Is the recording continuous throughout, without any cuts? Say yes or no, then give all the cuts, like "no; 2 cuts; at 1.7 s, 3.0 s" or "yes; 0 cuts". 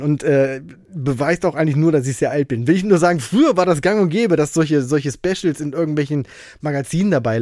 yes; 0 cuts